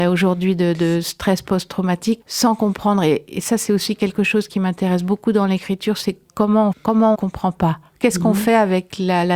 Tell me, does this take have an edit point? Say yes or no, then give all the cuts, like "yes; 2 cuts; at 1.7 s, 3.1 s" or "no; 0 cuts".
yes; 3 cuts; at 2.2 s, 6.7 s, 7.1 s